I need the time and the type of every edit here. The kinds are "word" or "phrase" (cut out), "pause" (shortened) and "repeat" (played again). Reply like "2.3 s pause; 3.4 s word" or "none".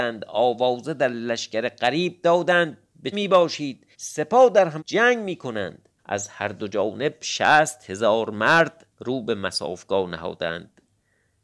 3.1 s word; 3.9 s pause; 4.8 s word; 6.0 s pause; 8.9 s pause